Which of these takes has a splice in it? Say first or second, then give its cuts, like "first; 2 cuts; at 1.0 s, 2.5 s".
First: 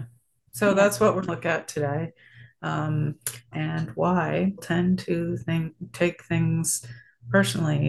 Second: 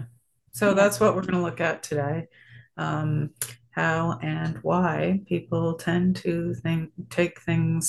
first; 3 cuts; at 1.3 s, 3.5 s, 4.6 s